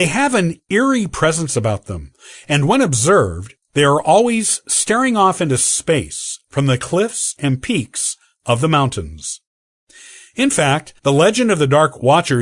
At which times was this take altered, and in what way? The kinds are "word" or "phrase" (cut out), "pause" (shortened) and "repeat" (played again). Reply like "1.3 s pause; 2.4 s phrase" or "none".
11.0 s pause